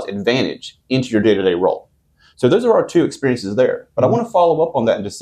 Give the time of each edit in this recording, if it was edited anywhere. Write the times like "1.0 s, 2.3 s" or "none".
none